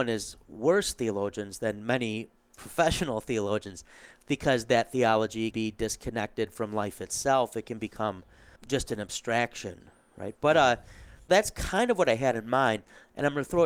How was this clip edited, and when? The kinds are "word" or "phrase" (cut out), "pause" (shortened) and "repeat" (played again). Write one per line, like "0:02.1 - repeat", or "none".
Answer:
0:05.5 - word
0:08.6 - word
0:11.3 - word